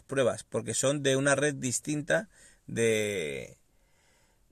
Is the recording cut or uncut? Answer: uncut